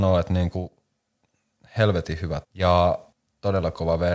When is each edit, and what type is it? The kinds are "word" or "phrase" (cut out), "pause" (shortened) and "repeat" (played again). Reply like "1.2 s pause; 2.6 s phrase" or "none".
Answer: 2.4 s word